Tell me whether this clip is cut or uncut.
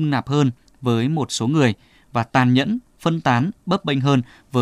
uncut